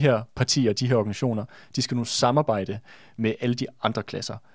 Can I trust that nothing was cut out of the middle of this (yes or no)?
yes